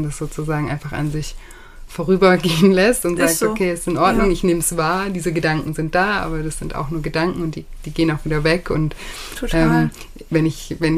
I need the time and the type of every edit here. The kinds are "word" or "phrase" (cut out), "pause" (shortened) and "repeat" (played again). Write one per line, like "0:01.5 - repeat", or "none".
none